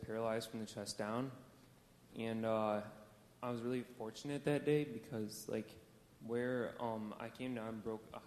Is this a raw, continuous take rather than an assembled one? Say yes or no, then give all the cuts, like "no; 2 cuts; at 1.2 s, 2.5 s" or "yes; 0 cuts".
yes; 0 cuts